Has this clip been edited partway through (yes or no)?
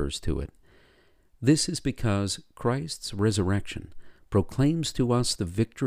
no